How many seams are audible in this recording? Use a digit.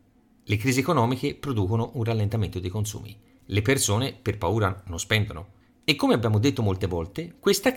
0